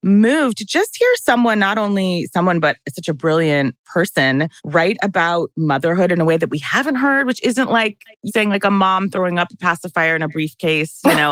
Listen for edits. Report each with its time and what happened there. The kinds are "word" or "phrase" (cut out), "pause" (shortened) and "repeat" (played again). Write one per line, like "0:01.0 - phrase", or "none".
0:04.6 - pause
0:08.3 - word